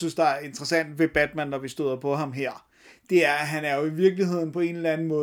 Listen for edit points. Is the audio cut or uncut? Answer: uncut